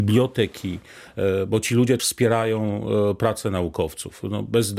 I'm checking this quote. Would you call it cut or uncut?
cut